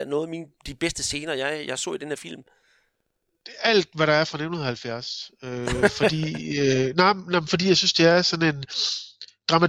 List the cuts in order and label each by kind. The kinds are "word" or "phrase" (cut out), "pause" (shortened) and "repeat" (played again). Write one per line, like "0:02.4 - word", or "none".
none